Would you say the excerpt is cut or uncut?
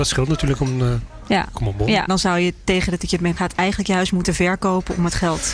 cut